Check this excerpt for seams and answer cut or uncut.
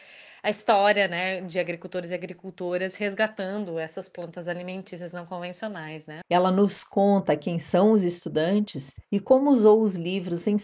cut